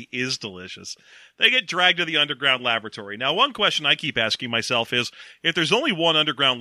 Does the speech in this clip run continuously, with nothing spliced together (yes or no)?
yes